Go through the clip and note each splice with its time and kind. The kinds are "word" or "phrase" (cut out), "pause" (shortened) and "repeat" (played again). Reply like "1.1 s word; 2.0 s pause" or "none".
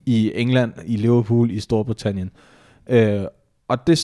none